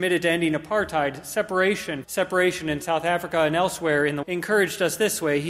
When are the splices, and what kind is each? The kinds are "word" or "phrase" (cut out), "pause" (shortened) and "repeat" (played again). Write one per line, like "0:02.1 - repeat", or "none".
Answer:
0:02.0 - word
0:04.2 - word